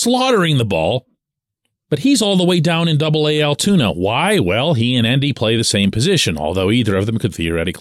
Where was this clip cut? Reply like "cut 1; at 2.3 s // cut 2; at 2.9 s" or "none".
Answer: none